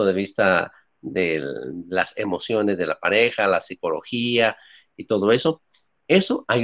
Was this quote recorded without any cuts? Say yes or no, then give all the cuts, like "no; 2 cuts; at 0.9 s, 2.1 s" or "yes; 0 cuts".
yes; 0 cuts